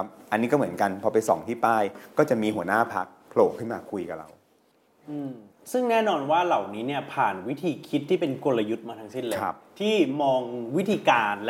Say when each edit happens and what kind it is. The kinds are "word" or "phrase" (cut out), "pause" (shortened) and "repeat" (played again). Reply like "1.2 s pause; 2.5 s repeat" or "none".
5.5 s pause